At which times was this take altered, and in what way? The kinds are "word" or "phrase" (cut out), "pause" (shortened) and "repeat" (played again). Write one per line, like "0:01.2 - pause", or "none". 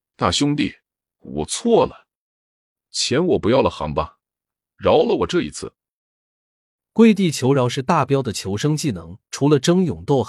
0:09.3 - phrase

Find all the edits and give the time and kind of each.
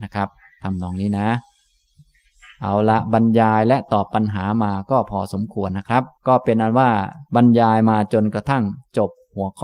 0:06.2 - pause
0:07.3 - pause

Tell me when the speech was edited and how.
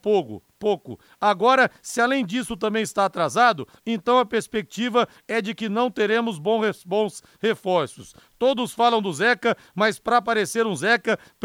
none

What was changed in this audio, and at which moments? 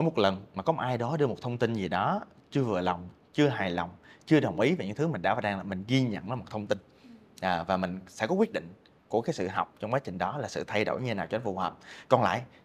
none

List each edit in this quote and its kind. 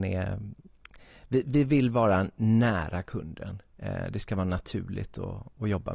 0:03.7 - pause

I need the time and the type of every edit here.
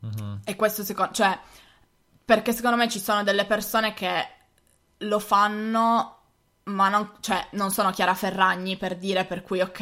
none

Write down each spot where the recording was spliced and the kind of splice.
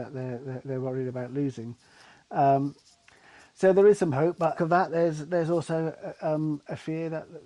0:04.6 - phrase

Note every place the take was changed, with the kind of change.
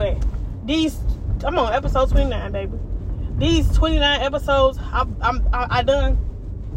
none

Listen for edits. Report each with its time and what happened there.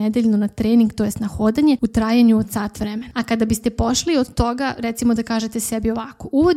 none

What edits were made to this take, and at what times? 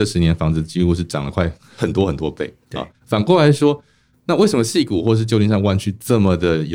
0:02.9 - pause

